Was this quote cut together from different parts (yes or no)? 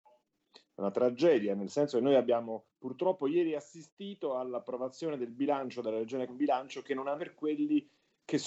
yes